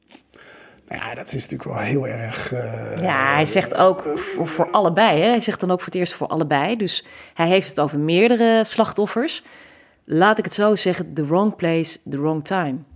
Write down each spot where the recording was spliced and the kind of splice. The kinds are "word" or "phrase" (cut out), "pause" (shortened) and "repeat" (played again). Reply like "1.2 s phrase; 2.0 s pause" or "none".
none